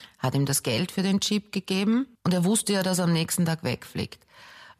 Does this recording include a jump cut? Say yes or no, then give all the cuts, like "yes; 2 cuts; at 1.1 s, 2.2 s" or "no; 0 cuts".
yes; 1 cut; at 2.1 s